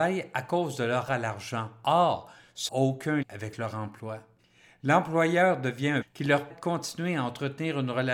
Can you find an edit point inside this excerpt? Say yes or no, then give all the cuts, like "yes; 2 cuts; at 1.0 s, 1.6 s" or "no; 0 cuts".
yes; 6 cuts; at 1.1 s, 2.7 s, 3.2 s, 4.4 s, 6.0 s, 6.5 s